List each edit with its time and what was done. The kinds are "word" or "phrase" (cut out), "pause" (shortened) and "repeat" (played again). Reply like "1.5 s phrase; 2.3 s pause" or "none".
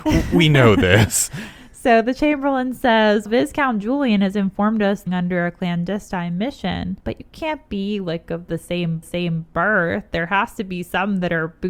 3.3 s word; 5.1 s phrase; 7.0 s pause; 9.0 s repeat